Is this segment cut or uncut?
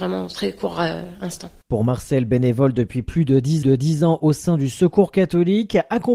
cut